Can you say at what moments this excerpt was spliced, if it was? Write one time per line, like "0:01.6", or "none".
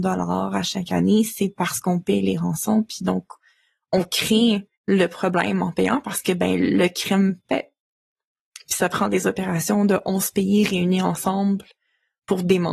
0:04.7

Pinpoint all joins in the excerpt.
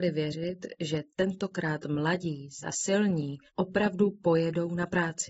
0:02.6
0:03.5

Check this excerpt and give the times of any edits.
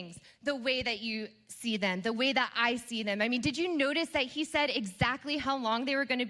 none

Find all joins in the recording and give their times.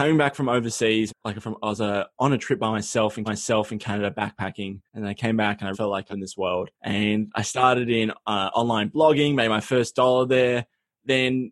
0:01.1
0:03.3
0:04.9
0:05.7
0:06.1
0:06.7

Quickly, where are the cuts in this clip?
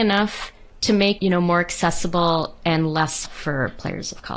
0:01.2
0:03.2

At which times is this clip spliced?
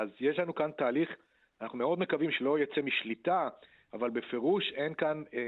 none

